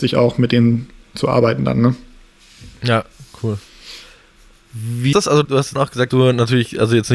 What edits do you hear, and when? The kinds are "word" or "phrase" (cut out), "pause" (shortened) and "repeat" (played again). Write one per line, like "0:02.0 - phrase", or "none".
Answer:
0:05.1 - word
0:05.4 - word
0:05.8 - word
0:06.1 - word